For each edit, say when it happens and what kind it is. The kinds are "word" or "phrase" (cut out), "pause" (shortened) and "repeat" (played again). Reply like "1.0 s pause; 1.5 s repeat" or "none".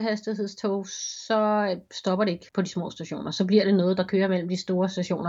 2.5 s pause